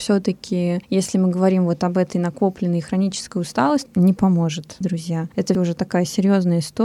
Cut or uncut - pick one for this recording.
cut